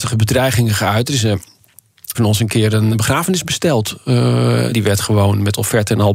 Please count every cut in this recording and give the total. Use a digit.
3